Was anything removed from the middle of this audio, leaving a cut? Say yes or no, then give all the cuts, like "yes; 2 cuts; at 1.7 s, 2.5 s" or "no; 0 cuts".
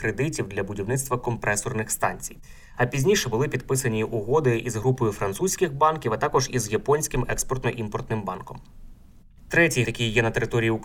yes; 1 cut; at 9.8 s